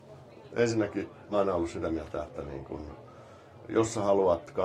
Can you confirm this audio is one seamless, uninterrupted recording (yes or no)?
no